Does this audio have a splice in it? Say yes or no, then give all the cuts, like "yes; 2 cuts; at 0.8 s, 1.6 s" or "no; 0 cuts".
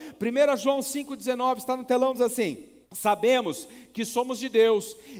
yes; 1 cut; at 2.8 s